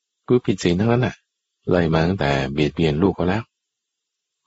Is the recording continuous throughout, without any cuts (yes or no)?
no